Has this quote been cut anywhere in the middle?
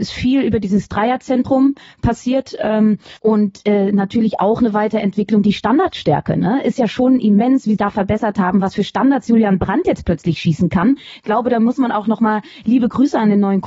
yes; 2 cuts; at 3.2 s, 7.8 s

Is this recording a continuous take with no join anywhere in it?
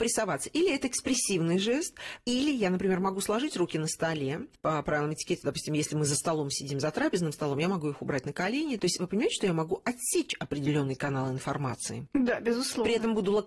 yes; 0 cuts

